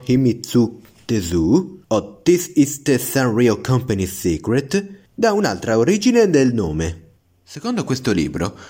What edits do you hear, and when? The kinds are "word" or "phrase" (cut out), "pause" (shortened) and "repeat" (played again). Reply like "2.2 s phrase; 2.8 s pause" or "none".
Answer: 1.8 s pause; 5.1 s pause; 7.2 s pause